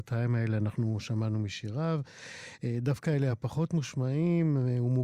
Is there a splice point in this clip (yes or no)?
no